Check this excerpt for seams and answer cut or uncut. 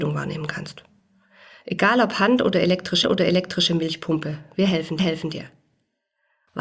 cut